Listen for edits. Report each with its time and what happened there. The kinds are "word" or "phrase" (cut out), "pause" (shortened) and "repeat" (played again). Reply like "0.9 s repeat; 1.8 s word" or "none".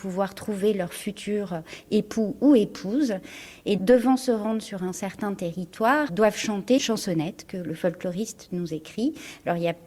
3.8 s word; 6.1 s word; 6.8 s word